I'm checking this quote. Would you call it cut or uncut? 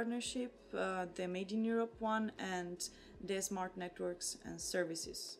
uncut